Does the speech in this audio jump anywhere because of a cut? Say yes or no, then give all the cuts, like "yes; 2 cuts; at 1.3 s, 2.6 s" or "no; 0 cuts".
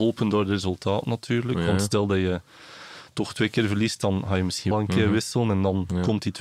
yes; 1 cut; at 4.7 s